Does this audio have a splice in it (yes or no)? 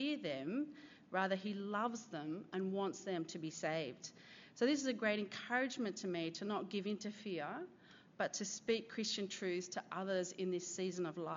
no